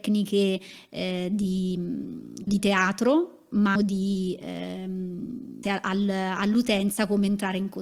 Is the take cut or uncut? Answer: cut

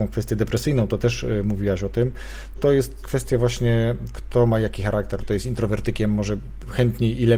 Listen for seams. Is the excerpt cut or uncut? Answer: cut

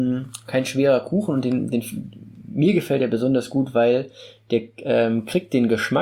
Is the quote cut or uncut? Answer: uncut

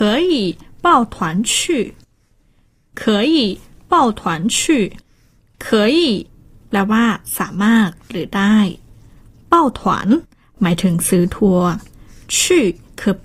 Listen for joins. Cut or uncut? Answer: uncut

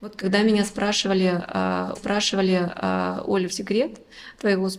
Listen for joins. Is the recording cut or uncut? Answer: cut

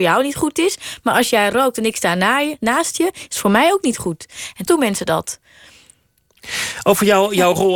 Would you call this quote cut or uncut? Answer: cut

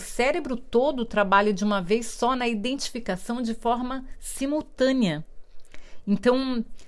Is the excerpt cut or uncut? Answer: uncut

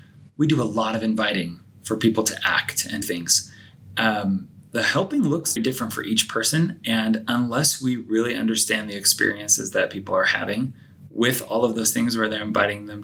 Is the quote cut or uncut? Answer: cut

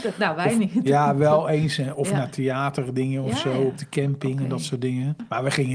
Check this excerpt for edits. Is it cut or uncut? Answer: uncut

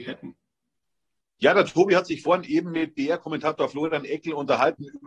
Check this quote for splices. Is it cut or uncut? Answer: uncut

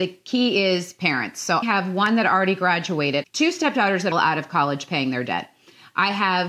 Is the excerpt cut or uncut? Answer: cut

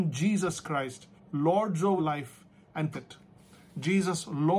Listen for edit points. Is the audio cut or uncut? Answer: cut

